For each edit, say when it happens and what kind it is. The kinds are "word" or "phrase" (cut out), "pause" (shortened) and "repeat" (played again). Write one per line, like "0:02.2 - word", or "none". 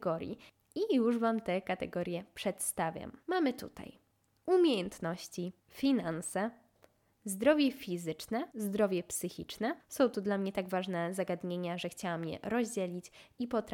0:03.2 - pause
0:05.6 - pause
0:08.5 - pause
0:09.8 - pause